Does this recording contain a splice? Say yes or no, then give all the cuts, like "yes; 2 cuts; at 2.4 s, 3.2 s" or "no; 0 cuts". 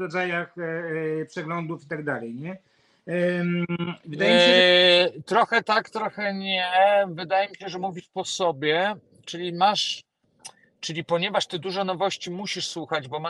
no; 0 cuts